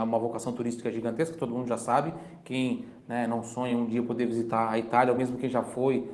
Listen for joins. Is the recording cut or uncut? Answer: uncut